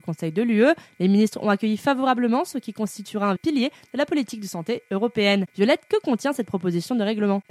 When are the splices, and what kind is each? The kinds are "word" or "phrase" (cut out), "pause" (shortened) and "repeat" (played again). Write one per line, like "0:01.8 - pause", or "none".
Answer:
0:03.4 - word